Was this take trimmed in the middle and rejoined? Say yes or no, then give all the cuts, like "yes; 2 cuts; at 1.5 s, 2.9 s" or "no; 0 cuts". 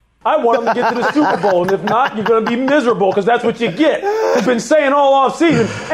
yes; 1 cut; at 4.4 s